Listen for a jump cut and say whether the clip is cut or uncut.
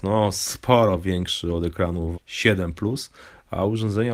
cut